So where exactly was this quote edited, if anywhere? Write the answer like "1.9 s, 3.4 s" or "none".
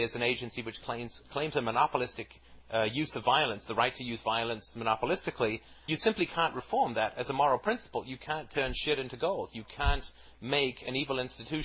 5.9 s

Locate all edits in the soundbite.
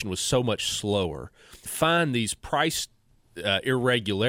1.7 s

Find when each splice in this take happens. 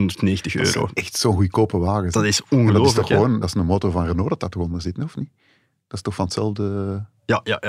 none

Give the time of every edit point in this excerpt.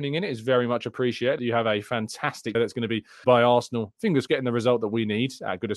1.4 s, 2.5 s, 3.2 s, 4.3 s

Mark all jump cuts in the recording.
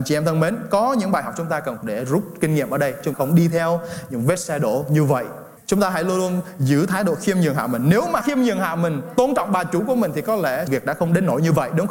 1.8 s, 3.1 s, 5.6 s, 8.2 s, 10.7 s

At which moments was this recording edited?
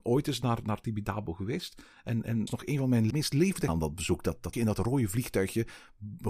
2.5 s, 3.1 s, 3.7 s, 4.5 s

